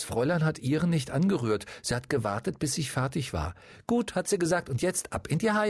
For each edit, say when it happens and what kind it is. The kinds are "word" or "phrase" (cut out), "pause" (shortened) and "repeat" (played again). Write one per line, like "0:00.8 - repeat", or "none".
none